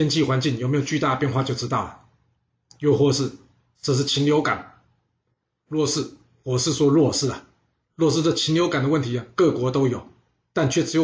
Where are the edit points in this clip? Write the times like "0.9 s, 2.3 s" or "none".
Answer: none